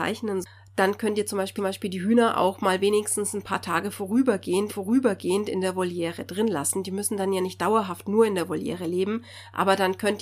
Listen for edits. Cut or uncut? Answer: cut